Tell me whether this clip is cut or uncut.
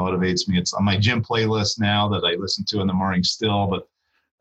uncut